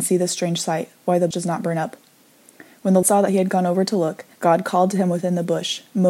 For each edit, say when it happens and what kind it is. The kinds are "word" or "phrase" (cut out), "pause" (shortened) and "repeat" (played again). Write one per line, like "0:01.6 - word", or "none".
0:01.3 - word
0:03.0 - word
0:04.3 - pause